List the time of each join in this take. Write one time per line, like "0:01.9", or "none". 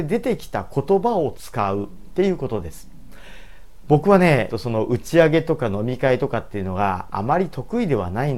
0:04.5

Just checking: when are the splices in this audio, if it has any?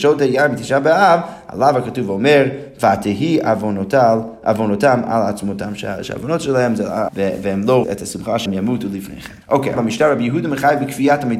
0:07.1
0:07.8
0:08.5
0:09.4
0:09.8

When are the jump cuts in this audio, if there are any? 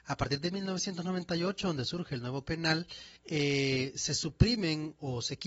0:02.4
0:03.2

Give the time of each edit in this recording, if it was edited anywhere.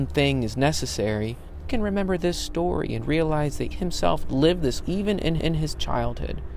0:01.7
0:03.7
0:04.8
0:05.4

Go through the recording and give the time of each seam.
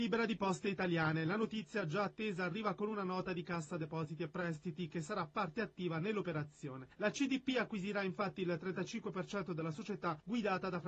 none

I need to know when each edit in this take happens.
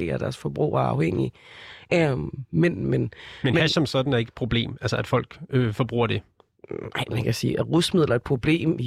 none

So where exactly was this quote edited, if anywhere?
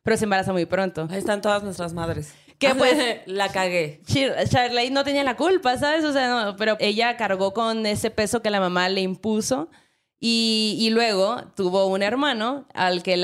0:06.8

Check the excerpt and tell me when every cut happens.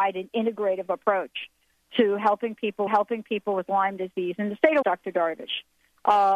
0:02.9
0:04.8

